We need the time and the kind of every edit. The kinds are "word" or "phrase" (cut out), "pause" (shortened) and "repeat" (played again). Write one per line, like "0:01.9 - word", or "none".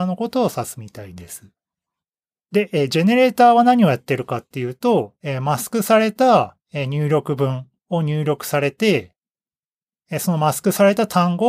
none